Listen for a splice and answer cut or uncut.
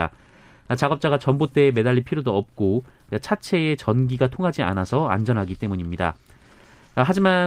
uncut